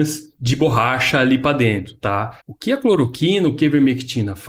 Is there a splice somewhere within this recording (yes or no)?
yes